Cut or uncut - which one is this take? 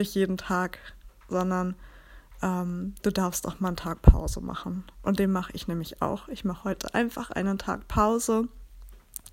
uncut